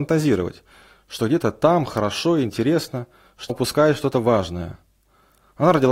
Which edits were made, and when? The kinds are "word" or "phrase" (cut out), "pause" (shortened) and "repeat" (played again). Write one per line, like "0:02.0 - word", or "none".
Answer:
0:03.5 - word